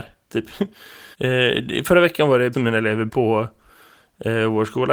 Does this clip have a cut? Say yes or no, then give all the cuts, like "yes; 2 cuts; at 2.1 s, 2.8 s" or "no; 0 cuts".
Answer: yes; 3 cuts; at 1.1 s, 2.5 s, 3.1 s